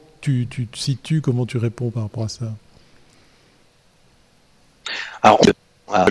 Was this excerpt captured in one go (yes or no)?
yes